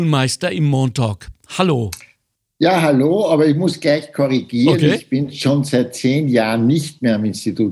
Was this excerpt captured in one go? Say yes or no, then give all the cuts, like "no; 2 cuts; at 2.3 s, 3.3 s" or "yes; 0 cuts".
yes; 0 cuts